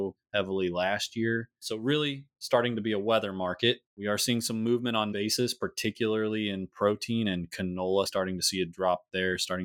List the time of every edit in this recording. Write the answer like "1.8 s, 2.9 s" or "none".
3.9 s, 5.1 s, 8.1 s